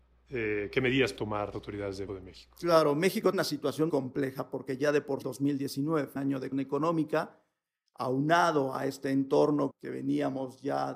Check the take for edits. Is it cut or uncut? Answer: cut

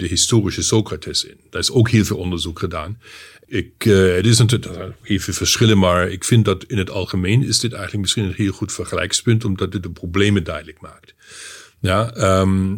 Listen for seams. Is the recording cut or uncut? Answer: uncut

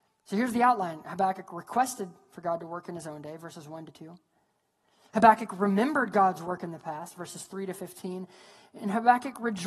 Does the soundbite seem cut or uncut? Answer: uncut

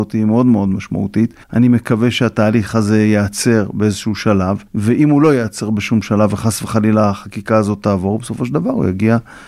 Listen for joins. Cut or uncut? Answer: cut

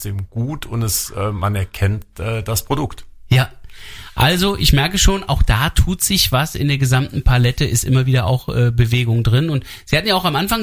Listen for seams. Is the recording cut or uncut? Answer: uncut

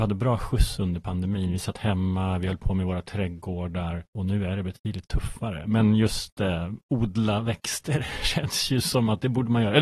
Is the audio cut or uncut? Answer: cut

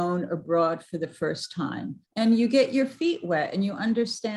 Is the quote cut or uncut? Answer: cut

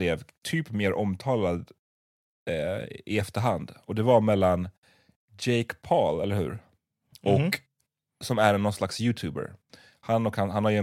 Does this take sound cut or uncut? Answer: uncut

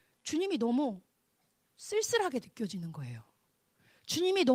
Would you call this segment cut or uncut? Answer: uncut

